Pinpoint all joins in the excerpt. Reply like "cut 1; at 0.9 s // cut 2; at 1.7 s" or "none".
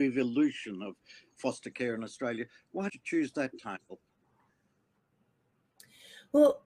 cut 1; at 2.9 s